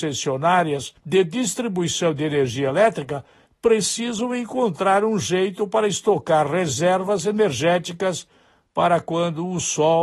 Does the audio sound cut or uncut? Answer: uncut